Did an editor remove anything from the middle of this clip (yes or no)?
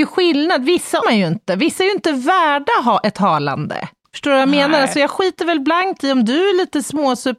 yes